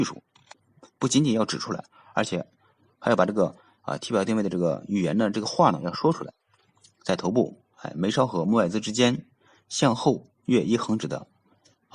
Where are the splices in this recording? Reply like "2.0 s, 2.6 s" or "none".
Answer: none